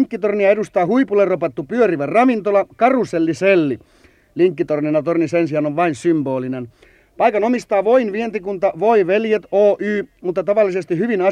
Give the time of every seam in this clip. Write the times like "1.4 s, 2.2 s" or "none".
none